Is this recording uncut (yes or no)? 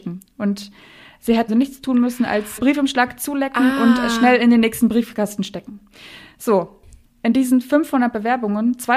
no